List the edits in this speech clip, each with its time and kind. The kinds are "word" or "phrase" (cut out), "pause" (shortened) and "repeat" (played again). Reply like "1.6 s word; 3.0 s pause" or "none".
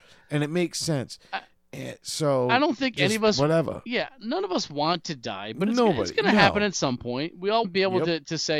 7.6 s word